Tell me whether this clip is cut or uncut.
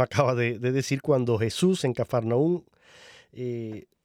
uncut